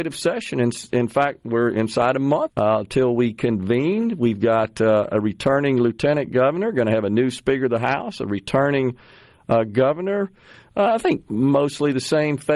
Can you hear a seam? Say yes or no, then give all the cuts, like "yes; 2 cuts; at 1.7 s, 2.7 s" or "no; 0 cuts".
yes; 1 cut; at 2.5 s